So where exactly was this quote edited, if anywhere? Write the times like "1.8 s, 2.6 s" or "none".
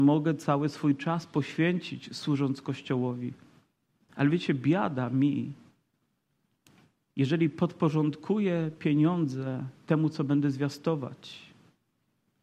none

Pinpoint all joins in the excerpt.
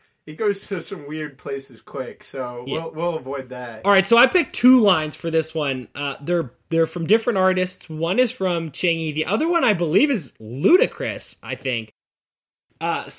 none

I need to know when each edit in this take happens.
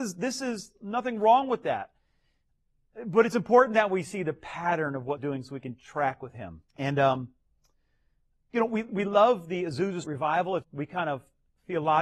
5.2 s, 6.7 s, 10.0 s, 10.6 s

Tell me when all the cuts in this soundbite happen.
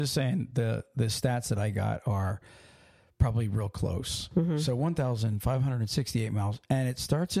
none

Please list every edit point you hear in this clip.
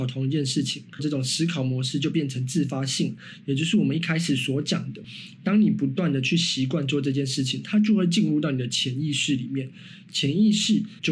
1.0 s

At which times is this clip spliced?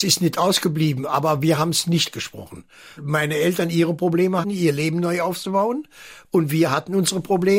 2.1 s, 3.0 s, 4.4 s

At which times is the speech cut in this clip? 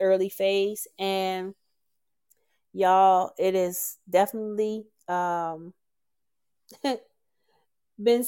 none

